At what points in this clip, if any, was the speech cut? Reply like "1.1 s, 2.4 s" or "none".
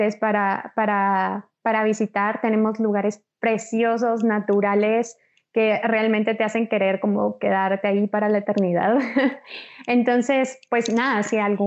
none